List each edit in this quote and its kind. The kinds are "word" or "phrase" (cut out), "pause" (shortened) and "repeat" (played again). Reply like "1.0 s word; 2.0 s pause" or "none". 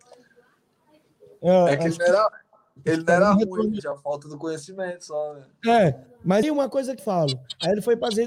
6.4 s word; 7.0 s word